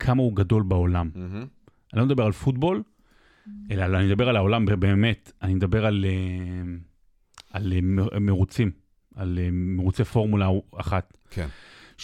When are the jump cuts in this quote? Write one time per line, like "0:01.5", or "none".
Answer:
none

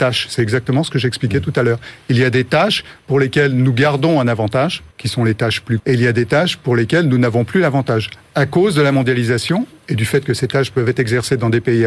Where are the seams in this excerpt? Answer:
0:04.9
0:05.8

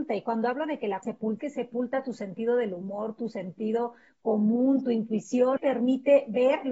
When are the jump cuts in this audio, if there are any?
0:01.0
0:01.4
0:05.6

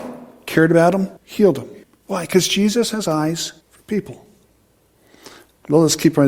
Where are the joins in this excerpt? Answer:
0:01.2
0:01.8
0:03.6

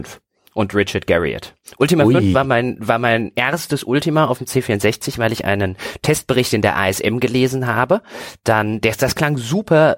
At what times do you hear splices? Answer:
none

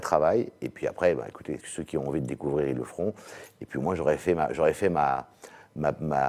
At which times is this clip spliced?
0:01.6

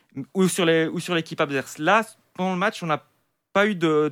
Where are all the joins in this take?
none

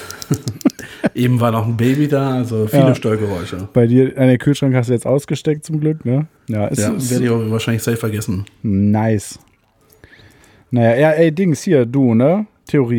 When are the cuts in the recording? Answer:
0:06.4

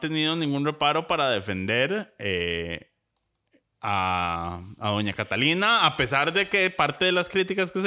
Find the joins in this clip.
none

